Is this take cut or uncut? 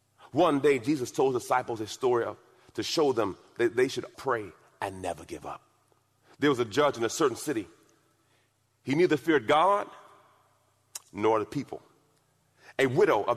cut